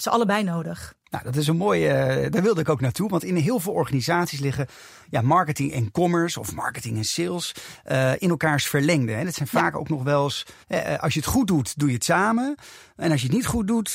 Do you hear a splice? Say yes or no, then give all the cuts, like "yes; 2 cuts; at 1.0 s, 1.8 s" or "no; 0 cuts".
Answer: yes; 2 cuts; at 1.0 s, 10.6 s